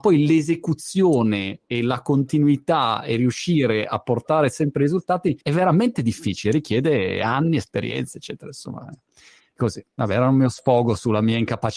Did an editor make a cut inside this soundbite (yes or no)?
yes